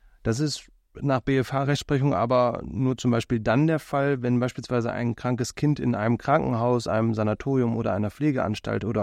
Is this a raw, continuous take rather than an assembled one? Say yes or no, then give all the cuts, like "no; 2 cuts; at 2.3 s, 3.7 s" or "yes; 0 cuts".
yes; 0 cuts